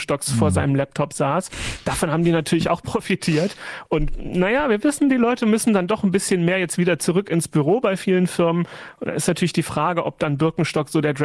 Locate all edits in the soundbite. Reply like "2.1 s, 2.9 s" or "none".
none